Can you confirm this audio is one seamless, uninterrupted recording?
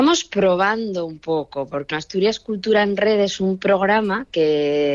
no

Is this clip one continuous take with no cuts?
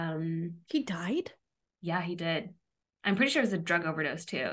yes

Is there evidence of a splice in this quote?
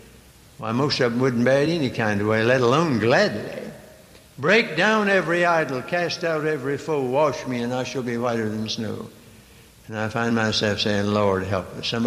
no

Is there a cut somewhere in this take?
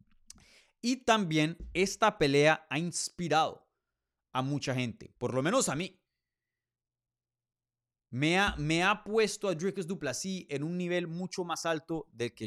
no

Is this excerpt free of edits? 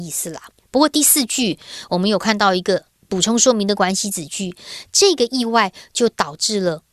yes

